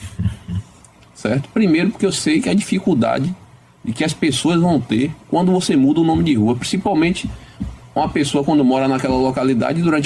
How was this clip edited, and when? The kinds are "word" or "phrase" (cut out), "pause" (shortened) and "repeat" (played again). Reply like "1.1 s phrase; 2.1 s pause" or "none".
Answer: none